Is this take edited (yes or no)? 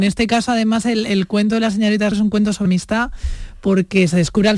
yes